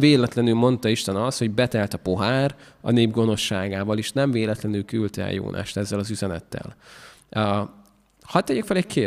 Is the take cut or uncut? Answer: uncut